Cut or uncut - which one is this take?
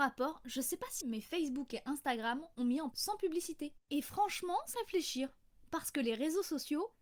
cut